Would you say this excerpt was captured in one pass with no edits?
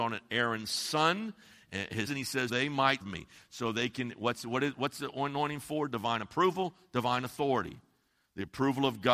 no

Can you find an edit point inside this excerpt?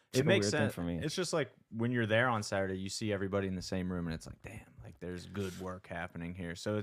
no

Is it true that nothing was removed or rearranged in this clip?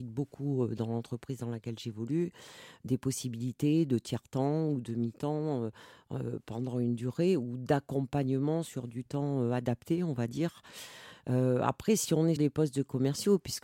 no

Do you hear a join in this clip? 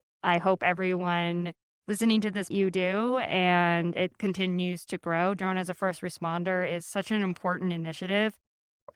yes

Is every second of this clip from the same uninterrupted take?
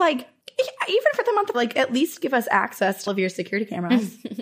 no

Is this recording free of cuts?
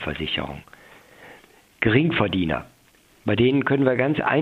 yes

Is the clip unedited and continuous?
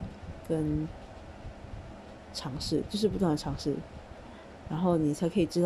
no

